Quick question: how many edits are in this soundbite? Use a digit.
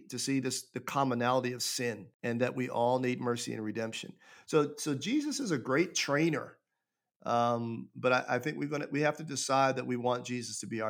1